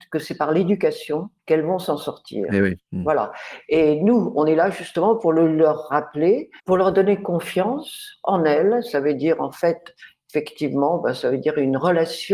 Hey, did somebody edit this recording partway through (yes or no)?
yes